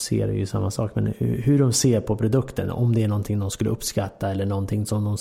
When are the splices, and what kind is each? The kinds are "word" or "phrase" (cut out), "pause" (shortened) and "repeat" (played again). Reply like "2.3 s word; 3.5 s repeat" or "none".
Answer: none